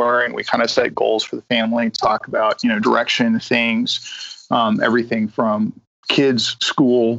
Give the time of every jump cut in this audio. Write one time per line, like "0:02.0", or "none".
none